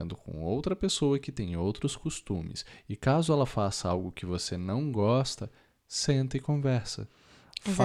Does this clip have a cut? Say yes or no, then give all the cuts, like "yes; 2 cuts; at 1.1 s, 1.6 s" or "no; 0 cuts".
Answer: no; 0 cuts